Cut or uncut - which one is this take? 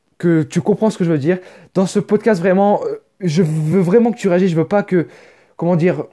uncut